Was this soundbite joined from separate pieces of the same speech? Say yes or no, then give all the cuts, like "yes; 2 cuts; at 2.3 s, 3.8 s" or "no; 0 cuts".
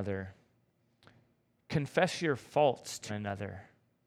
yes; 1 cut; at 3.1 s